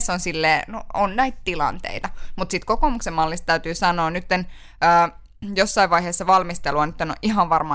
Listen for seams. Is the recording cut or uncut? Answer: uncut